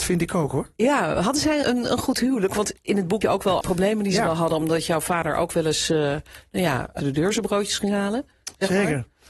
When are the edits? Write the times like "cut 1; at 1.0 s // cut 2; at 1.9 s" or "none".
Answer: cut 1; at 1.6 s // cut 2; at 3.2 s // cut 3; at 3.6 s // cut 4; at 7.0 s